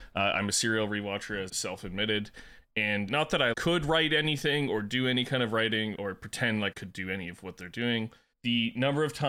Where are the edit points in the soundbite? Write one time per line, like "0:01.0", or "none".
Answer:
0:01.5
0:03.1
0:03.5
0:05.9
0:06.7
0:08.3